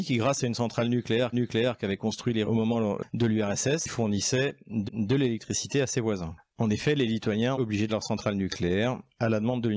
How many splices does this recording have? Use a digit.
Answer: 5